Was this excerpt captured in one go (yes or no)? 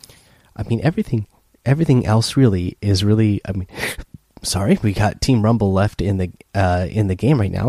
yes